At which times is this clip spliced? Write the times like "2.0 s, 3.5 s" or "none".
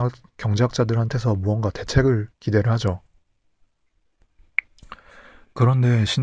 2.3 s